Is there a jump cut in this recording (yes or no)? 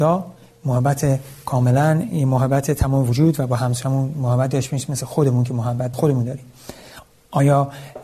yes